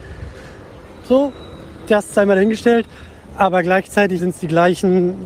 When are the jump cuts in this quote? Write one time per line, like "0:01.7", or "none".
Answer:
0:04.2